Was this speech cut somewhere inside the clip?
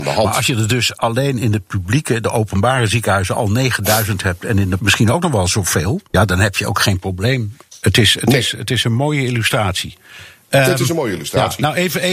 yes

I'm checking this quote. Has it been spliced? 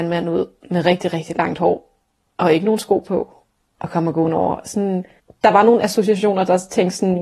no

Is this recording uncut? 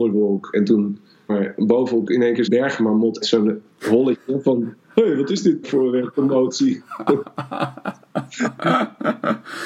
no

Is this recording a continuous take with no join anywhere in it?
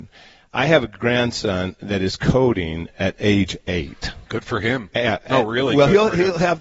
no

